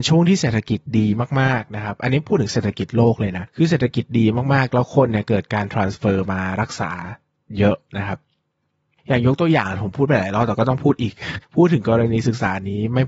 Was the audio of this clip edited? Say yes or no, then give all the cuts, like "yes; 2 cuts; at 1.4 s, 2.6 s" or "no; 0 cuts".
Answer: no; 0 cuts